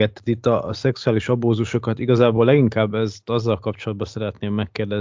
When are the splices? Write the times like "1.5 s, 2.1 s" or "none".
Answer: none